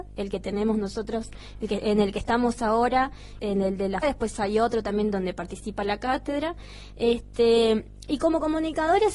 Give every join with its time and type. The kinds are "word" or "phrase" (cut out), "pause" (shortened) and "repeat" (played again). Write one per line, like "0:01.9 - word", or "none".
0:03.4 - word
0:04.0 - word